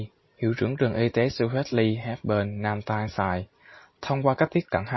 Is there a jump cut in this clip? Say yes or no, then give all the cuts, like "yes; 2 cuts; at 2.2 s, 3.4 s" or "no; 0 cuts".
no; 0 cuts